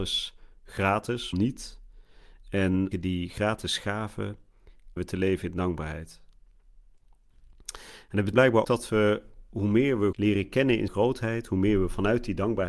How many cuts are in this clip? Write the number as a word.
seven